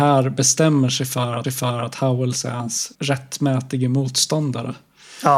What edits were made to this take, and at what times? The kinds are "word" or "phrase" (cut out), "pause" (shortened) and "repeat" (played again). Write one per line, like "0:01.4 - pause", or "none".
0:01.4 - repeat
0:02.9 - pause